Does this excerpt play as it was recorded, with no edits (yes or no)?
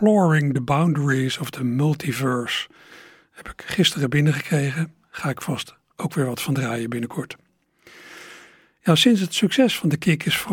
yes